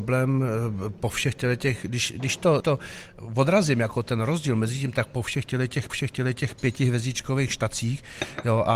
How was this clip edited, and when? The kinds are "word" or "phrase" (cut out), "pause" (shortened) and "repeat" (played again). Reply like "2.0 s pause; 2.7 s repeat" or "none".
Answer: 2.6 s word; 5.9 s repeat